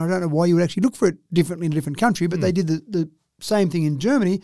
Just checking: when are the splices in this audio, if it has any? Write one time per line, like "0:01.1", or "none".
none